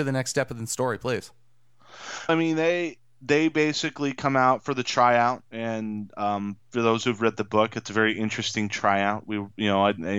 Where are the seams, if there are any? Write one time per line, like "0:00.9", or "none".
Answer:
0:02.3